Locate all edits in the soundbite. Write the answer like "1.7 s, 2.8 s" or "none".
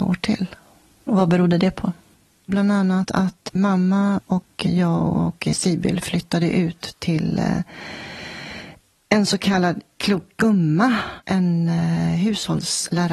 none